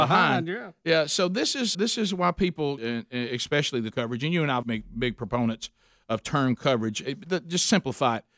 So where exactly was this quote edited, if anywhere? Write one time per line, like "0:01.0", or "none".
0:01.7
0:02.8
0:03.9
0:04.6